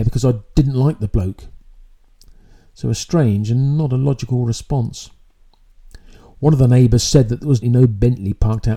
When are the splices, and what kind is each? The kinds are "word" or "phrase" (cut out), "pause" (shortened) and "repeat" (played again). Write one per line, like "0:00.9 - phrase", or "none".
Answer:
0:07.6 - word